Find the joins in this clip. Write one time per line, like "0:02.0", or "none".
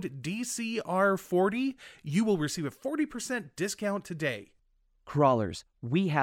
0:04.6